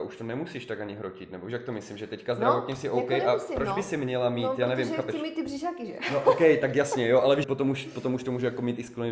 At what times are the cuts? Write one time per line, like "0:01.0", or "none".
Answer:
0:07.4